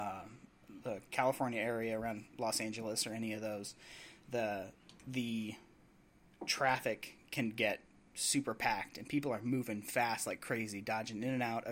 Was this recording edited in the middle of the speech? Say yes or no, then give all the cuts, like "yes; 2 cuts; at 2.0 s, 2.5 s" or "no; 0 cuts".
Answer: no; 0 cuts